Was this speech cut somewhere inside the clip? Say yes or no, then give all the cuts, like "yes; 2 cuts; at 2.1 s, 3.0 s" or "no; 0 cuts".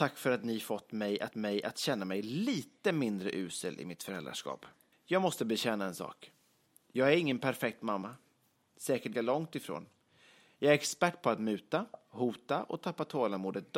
yes; 3 cuts; at 1.3 s, 4.9 s, 9.1 s